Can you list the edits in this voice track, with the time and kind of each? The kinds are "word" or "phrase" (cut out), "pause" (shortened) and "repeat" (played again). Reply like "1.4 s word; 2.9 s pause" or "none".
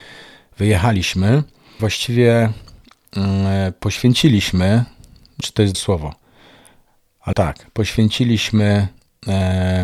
1.8 s word; 5.4 s word; 5.7 s word; 7.3 s word